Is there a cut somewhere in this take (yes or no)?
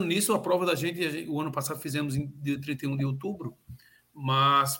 no